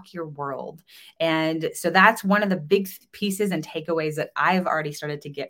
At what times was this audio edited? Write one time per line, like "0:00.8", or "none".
none